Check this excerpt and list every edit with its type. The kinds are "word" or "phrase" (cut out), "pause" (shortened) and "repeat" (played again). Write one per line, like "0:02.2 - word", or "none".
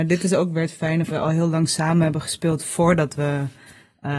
0:01.1 - phrase

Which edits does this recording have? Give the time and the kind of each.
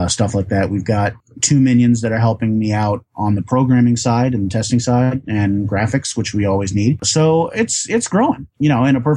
none

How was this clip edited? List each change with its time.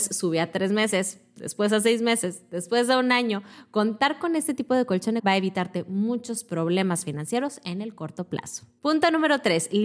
0:05.2 - phrase

